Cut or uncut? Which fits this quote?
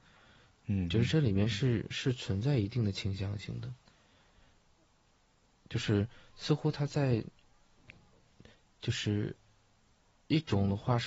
uncut